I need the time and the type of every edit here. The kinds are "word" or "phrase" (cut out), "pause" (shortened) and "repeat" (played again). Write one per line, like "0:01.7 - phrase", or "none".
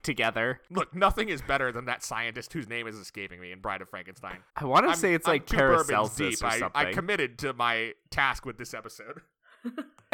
0:04.5 - pause